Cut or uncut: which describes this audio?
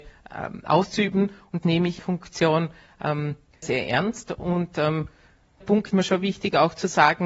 cut